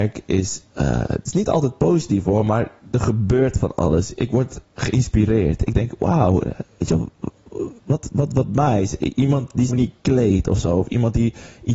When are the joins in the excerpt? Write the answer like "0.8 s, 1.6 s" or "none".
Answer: 7.8 s, 9.7 s